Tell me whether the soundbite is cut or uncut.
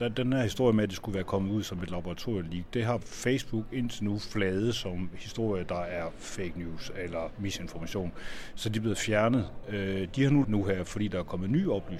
cut